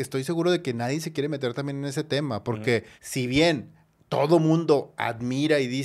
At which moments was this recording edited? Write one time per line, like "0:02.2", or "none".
0:03.0